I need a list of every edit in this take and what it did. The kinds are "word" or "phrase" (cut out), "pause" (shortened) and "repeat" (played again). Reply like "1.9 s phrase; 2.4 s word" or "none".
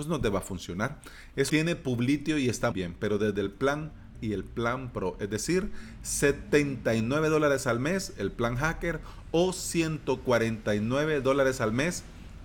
1.5 s word; 2.7 s word; 4.1 s word

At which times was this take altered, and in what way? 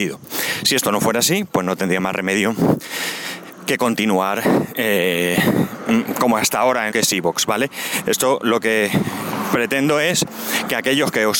6.9 s word

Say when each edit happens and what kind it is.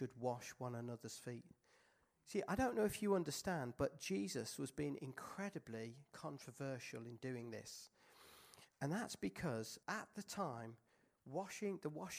9.8 s pause

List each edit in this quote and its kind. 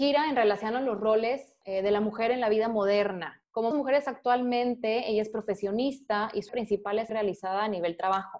3.7 s word; 6.5 s word; 7.1 s word

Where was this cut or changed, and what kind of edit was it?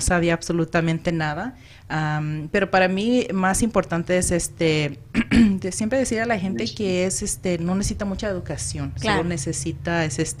none

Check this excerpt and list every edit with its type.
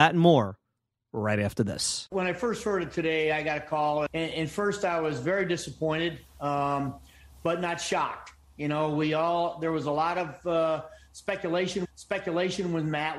4.1 s word; 11.8 s repeat

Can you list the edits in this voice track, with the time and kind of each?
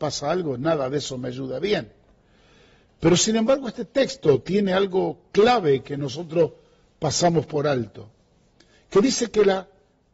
none

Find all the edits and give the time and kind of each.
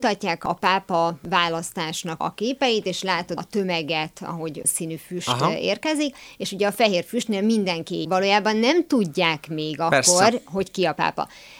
2.2 s word; 3.4 s word; 4.6 s phrase; 8.0 s phrase

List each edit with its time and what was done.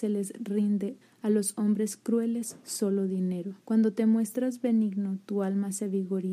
1.0 s word; 3.6 s pause

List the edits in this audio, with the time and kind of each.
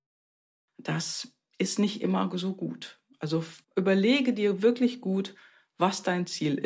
3.6 s pause

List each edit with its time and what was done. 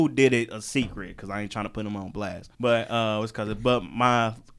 2.5 s pause

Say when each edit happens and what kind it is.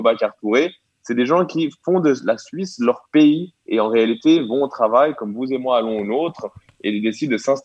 3.6 s pause

